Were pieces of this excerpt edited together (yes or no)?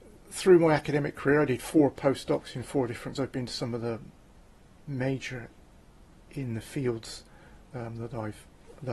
yes